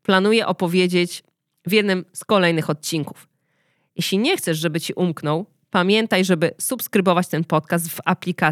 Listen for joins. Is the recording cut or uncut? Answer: uncut